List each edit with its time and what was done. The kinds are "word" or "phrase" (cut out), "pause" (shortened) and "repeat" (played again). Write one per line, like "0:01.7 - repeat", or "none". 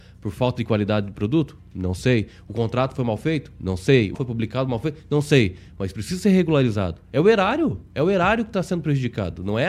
0:04.1 - word